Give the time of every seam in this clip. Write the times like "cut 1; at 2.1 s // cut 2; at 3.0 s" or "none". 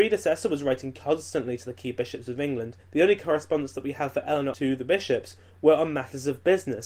cut 1; at 2.8 s